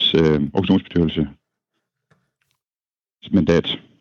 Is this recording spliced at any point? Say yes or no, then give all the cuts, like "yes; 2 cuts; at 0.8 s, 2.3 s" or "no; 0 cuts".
no; 0 cuts